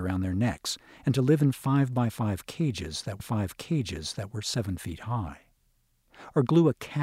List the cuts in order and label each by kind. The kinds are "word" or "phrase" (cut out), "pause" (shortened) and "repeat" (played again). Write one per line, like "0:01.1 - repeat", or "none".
0:03.2 - repeat